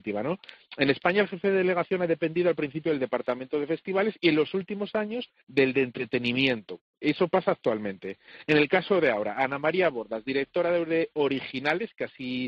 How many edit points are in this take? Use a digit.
1